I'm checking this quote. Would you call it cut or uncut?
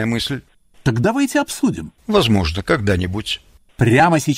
cut